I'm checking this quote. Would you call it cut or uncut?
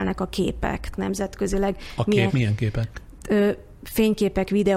cut